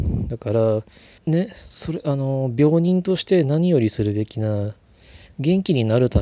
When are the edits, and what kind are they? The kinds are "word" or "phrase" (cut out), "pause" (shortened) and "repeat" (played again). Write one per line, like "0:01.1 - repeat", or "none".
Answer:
0:01.2 - pause